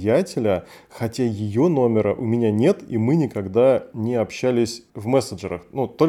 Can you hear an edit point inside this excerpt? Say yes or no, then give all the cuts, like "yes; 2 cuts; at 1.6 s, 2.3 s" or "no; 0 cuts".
yes; 1 cut; at 4.9 s